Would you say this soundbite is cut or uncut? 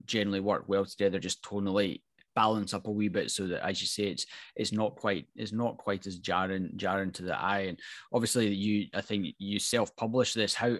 uncut